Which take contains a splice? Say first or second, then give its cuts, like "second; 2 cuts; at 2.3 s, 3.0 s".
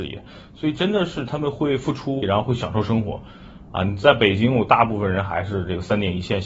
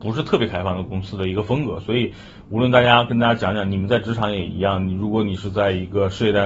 first; 1 cut; at 2.2 s